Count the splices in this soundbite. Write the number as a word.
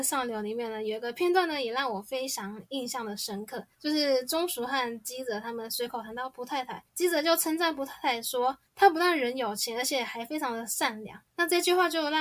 four